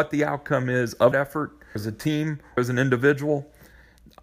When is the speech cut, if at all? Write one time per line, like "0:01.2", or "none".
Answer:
0:01.1
0:01.8
0:02.6

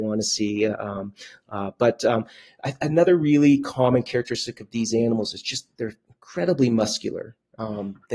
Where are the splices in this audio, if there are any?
none

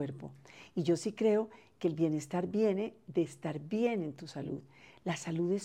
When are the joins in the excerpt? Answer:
none

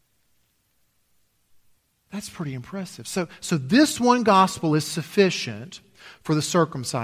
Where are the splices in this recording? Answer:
none

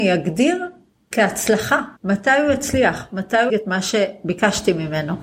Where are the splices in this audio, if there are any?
0:02.0
0:03.5

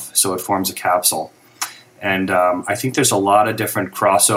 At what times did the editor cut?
none

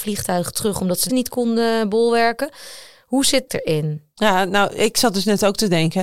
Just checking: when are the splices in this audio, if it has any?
0:01.1
0:03.5

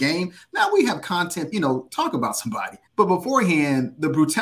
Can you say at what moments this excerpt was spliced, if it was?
0:01.5
0:02.9

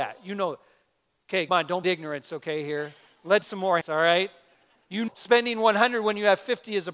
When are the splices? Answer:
0:01.5
0:01.8
0:03.4
0:03.8
0:05.1

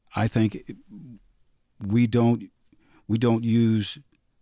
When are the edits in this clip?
none

